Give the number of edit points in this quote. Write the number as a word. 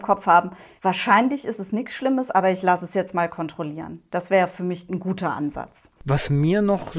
one